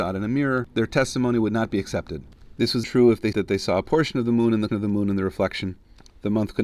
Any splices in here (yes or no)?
yes